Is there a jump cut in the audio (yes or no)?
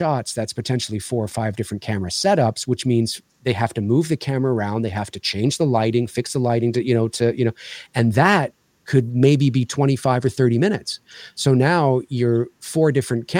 no